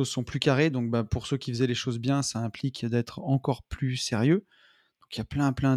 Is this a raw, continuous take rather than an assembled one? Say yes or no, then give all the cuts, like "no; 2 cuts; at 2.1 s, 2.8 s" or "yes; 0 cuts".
yes; 0 cuts